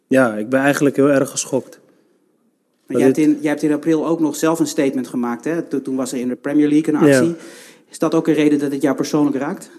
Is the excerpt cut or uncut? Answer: uncut